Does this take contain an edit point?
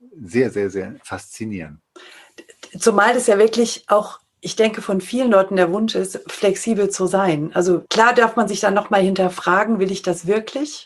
yes; 1 cut; at 7.9 s

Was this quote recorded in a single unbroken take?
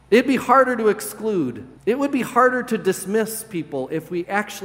no; 1 cut; at 1.8 s

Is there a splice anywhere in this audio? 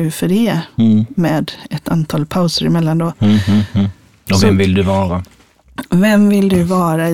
no; 0 cuts

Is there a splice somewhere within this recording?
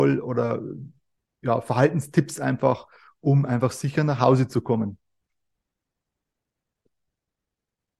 no; 0 cuts

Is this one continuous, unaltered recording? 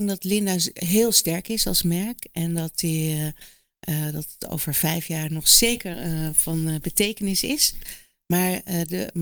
yes; 0 cuts

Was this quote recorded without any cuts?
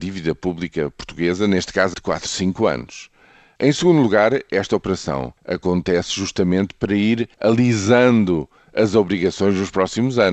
no; 3 cuts; at 1.9 s, 5.4 s, 7.3 s

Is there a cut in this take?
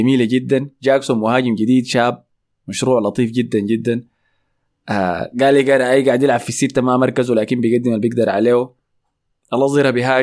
no; 0 cuts

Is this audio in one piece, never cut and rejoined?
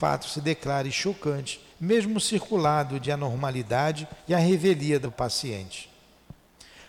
no; 3 cuts; at 1.7 s, 4.2 s, 5.0 s

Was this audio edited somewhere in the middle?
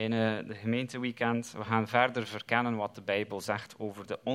no; 0 cuts

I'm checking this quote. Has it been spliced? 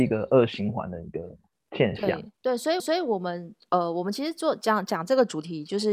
yes; 1 cut; at 2.8 s

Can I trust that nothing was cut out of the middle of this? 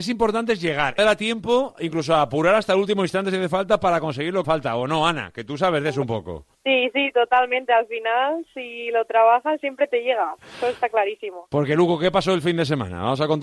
no; 3 cuts; at 1.0 s, 4.4 s, 6.5 s

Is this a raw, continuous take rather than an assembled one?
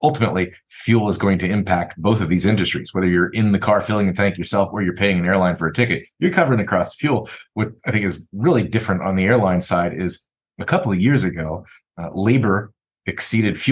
yes; 0 cuts

